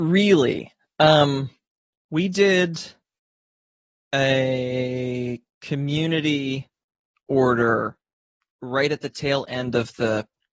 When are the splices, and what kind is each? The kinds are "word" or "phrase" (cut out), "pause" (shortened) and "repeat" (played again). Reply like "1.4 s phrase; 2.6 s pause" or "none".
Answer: none